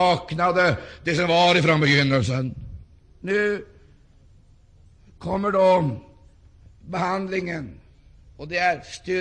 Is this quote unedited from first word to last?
yes; 0 cuts

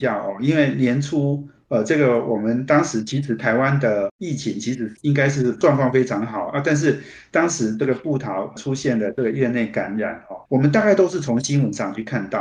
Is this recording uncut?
no; 1 cut; at 10.4 s

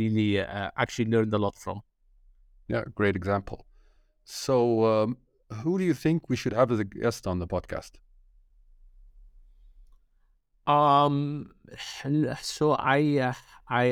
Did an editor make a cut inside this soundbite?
no; 0 cuts

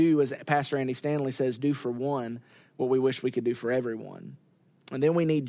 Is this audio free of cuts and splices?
yes; 0 cuts

